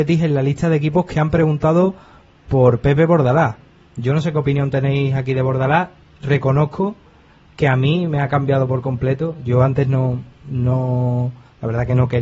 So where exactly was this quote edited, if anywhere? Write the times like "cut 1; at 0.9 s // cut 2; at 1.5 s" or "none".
none